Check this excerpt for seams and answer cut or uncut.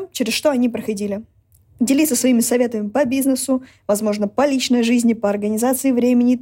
uncut